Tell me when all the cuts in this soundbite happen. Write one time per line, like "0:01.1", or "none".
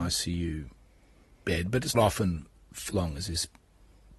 0:01.9
0:02.9